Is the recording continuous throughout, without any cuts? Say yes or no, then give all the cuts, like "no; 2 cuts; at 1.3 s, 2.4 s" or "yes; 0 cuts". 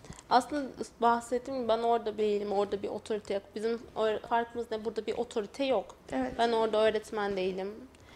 no; 2 cuts; at 2.2 s, 4.2 s